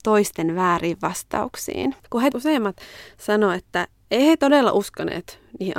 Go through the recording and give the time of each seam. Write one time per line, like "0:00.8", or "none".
0:02.0
0:02.3

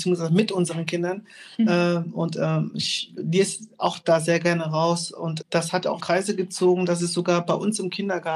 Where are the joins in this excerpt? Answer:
0:03.2
0:05.4
0:06.0

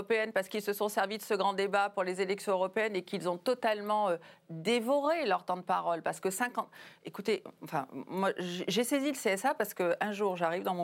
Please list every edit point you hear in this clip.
none

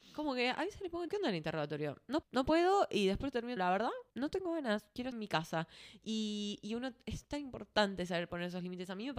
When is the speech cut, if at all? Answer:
0:01.1
0:02.2
0:03.6
0:04.1
0:05.1

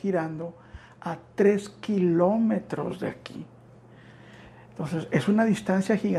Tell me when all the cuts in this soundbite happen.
none

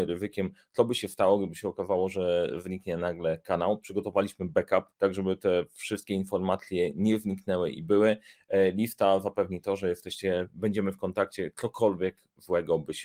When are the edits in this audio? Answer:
0:04.9

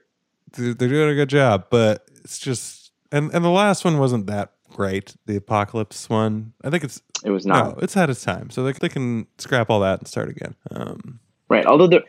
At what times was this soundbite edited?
0:03.0
0:04.6
0:08.8
0:10.6

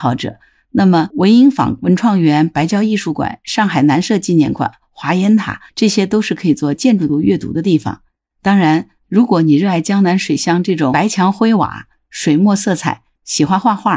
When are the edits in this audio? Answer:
0:05.7

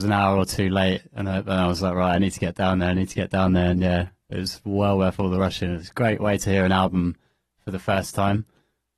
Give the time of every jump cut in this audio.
none

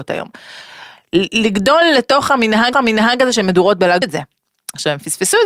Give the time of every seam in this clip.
0:02.7
0:04.0

